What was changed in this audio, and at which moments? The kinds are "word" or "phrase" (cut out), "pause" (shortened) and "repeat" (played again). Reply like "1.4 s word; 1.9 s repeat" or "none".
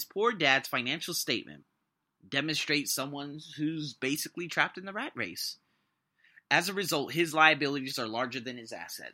none